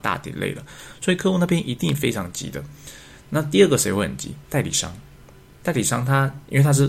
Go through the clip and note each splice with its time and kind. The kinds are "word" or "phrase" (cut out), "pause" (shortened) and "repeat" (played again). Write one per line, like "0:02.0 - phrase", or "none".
none

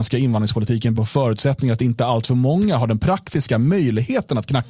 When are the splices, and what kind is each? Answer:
0:01.0 - word

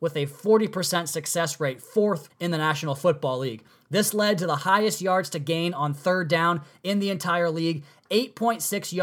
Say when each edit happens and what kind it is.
0:02.3 - word

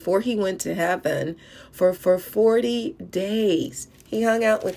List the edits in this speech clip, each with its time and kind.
0:01.9 - repeat

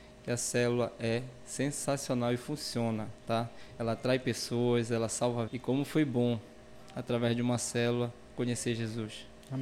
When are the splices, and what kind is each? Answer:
0:05.5 - word

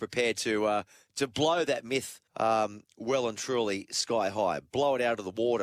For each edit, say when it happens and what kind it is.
0:02.3 - pause

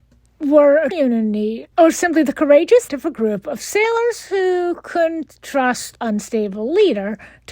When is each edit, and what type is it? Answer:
0:00.9 - word
0:01.7 - pause
0:02.9 - word
0:06.0 - word

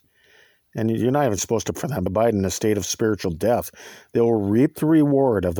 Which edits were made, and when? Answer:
0:01.7 - word
0:02.1 - phrase

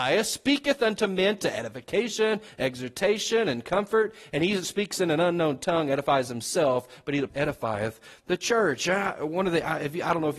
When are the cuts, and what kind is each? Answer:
0:07.3 - word

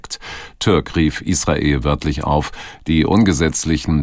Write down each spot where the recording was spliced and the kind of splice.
none

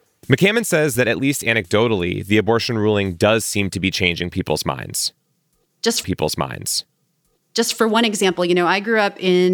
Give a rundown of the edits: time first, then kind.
0:06.0 - repeat

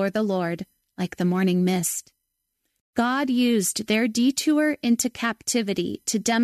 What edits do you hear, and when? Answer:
none

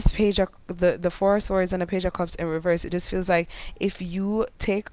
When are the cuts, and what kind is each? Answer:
none

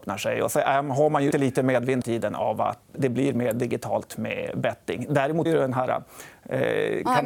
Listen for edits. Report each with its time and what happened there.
0:01.3 - word
0:02.0 - word
0:02.9 - word
0:05.5 - word

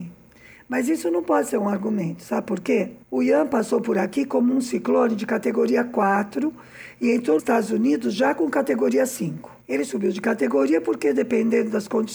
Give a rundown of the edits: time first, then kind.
0:03.0 - pause
0:07.4 - word
0:09.6 - pause

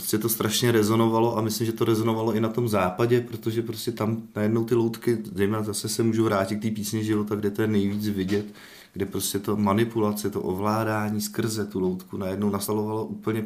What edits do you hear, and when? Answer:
none

